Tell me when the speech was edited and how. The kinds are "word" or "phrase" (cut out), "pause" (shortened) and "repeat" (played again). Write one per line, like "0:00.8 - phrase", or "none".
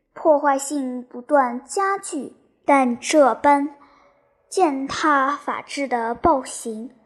none